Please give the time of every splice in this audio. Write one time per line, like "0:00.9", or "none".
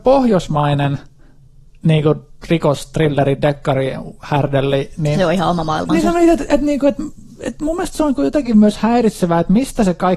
none

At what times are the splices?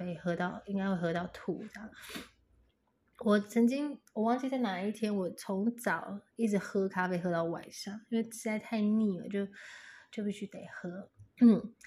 0:06.3

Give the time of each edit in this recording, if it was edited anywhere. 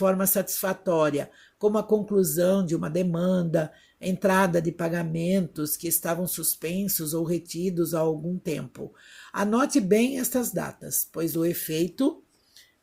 none

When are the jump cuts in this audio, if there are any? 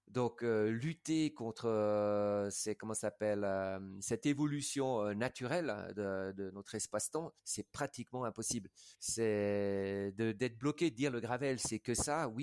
0:07.4
0:08.9

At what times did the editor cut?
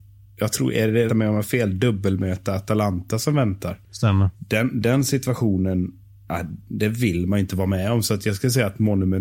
0:01.1
0:04.3

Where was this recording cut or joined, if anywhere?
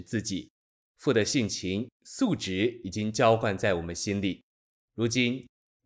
none

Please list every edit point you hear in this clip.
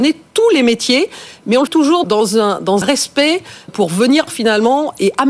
0:01.7
0:02.0
0:02.8
0:03.7
0:04.3

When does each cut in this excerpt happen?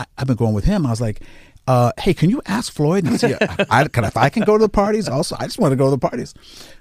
none

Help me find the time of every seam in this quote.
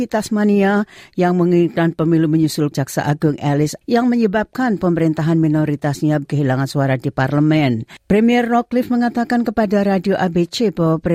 0:02.7
0:03.8
0:06.2
0:08.0

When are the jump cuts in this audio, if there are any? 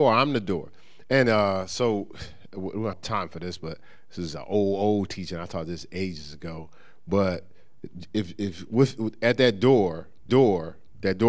0:02.9
0:10.3

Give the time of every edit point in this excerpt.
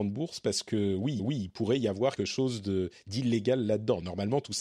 0:01.2
0:02.2

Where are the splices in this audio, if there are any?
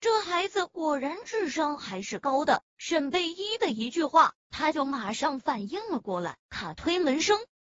0:06.4

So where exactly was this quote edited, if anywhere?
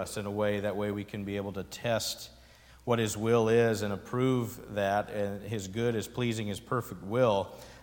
none

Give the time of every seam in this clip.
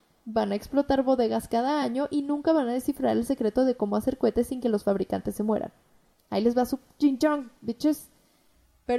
none

